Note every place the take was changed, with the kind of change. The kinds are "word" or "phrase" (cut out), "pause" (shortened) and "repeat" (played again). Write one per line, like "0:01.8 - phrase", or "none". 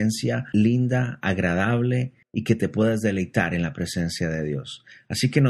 0:02.2 - pause